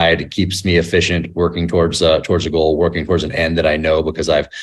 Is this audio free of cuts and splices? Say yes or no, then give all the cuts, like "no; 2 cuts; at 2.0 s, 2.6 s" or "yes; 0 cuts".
yes; 0 cuts